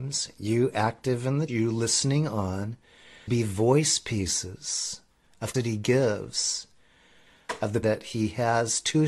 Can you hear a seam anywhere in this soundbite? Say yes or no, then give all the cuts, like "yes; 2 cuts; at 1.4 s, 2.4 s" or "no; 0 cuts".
yes; 4 cuts; at 1.5 s, 3.3 s, 5.5 s, 7.8 s